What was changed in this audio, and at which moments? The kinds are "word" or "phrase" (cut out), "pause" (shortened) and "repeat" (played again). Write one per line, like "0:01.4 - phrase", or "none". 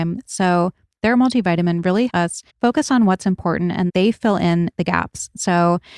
0:02.1 - word
0:02.5 - pause
0:03.9 - word